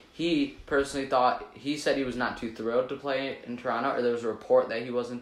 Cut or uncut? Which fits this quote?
uncut